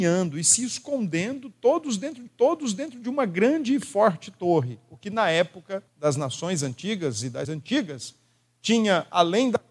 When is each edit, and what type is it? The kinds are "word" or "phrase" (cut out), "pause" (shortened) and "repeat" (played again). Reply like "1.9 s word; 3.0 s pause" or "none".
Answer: 2.3 s repeat; 5.9 s pause; 7.4 s word